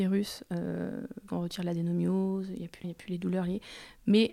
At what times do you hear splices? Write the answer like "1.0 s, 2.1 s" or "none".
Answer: 1.3 s, 2.8 s